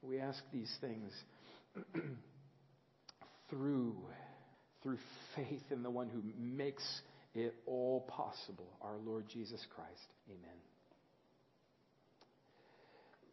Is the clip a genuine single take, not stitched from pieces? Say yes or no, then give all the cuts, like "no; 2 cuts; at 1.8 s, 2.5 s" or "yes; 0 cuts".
no; 2 cuts; at 4.5 s, 10.2 s